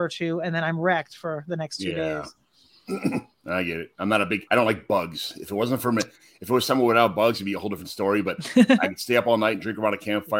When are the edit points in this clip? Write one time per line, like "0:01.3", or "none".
0:04.5